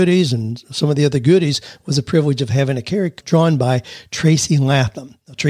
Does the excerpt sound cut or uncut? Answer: cut